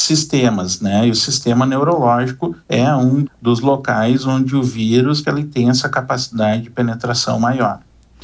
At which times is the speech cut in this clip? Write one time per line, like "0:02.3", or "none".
0:02.6
0:03.2
0:05.2